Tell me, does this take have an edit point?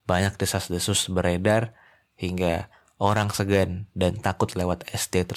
no; 0 cuts

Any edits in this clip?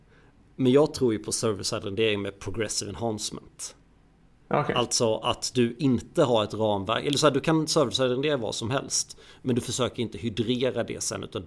no; 0 cuts

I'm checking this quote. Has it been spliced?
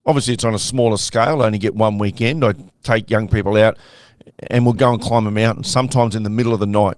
no; 0 cuts

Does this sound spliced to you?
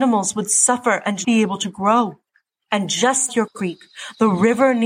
yes; 2 cuts; at 1.2 s, 3.3 s

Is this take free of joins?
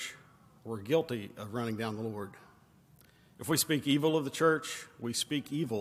yes; 0 cuts

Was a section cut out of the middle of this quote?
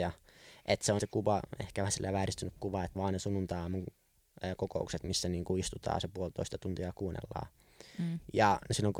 yes; 2 cuts; at 1.0 s, 2.9 s

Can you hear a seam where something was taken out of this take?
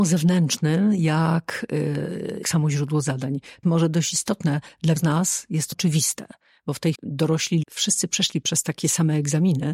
yes; 6 cuts; at 2.4 s, 3.6 s, 5.0 s, 5.7 s, 6.9 s, 7.6 s

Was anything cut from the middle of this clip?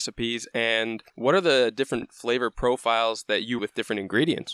yes; 2 cuts; at 1.1 s, 3.6 s

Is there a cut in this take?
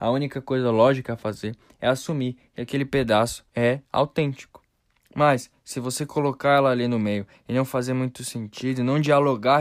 no; 0 cuts

